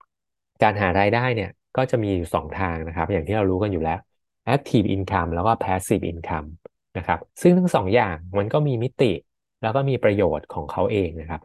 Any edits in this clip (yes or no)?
yes